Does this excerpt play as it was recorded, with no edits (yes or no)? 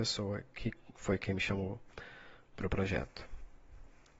yes